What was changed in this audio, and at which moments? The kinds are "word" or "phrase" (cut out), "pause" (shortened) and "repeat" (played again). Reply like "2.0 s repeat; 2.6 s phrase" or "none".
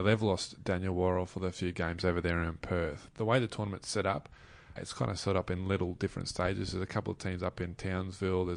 1.5 s word; 3.1 s word; 4.8 s word